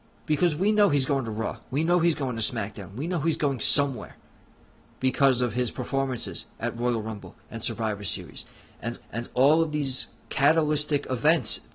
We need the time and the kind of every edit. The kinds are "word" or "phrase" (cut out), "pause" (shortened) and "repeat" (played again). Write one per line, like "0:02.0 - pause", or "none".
0:06.5 - pause
0:07.4 - pause
0:09.0 - repeat

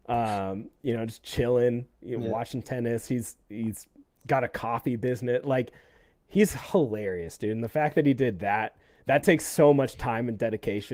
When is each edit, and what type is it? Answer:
none

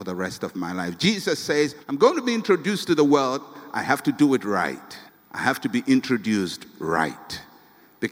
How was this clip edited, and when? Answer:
0:01.8 - pause
0:05.1 - pause

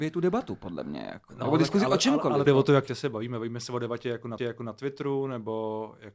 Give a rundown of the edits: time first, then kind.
0:02.5 - phrase
0:02.9 - word
0:04.4 - repeat

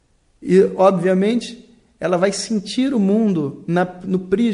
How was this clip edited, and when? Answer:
none

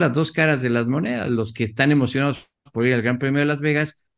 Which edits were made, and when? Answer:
none

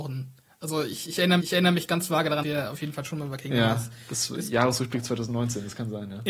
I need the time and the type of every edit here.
0:01.4 - repeat
0:02.4 - word

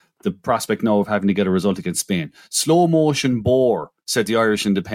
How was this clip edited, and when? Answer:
0:04.0 - pause

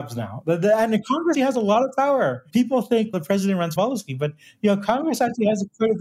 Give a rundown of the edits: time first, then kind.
0:01.3 - word
0:03.1 - word
0:03.8 - word

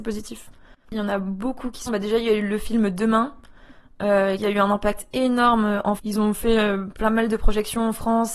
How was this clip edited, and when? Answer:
0:01.9 - word
0:04.4 - word
0:06.0 - word
0:06.9 - word

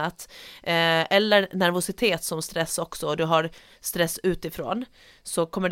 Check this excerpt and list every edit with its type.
none

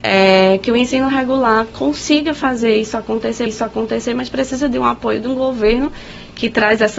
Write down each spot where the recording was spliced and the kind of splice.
0:03.5 - repeat

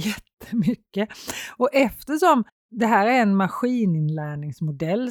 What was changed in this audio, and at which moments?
0:02.5 - pause

